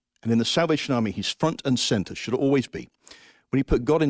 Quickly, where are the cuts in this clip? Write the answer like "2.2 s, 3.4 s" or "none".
none